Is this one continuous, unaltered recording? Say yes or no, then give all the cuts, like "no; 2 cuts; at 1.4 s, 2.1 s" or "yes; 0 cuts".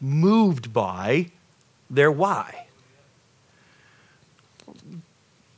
yes; 0 cuts